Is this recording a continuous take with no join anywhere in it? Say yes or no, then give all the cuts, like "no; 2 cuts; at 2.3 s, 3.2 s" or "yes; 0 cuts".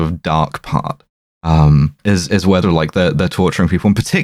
no; 2 cuts; at 2.0 s, 2.6 s